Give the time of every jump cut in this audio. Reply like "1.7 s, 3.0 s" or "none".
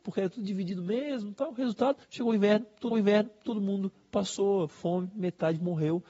2.0 s, 2.9 s, 4.7 s